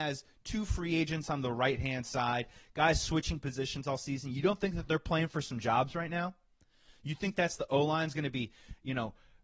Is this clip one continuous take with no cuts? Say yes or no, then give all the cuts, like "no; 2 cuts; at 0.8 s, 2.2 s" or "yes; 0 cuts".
yes; 0 cuts